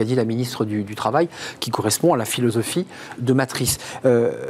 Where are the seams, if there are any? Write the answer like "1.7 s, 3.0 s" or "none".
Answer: 3.2 s